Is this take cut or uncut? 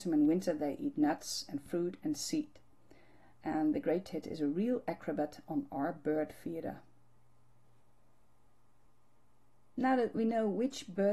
uncut